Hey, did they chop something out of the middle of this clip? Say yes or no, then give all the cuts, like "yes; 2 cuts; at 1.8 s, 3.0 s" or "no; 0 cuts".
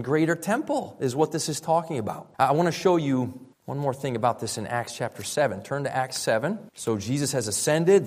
yes; 3 cuts; at 2.3 s, 3.5 s, 6.7 s